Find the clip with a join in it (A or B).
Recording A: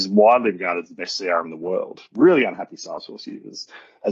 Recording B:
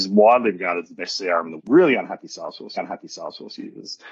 B